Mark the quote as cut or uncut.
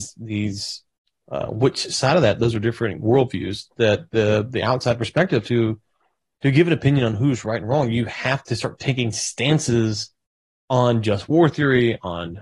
uncut